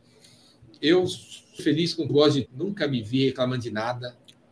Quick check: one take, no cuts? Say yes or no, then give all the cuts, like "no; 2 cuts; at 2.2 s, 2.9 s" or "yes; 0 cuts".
no; 3 cuts; at 1.6 s, 2.1 s, 2.5 s